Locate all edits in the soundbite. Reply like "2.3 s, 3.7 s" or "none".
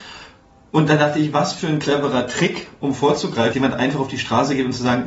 3.5 s